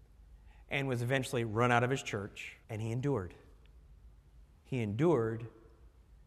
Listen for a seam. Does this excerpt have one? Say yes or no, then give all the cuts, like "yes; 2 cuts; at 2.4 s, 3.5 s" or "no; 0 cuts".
yes; 1 cut; at 2.6 s